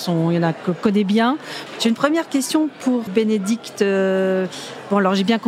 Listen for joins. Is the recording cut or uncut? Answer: cut